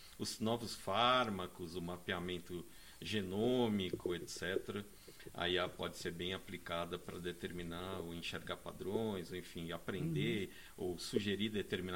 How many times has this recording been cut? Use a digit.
0